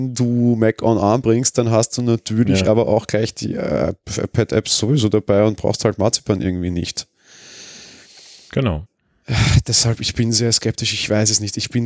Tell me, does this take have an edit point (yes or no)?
no